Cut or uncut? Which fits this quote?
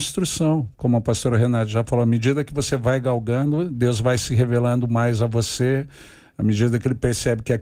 uncut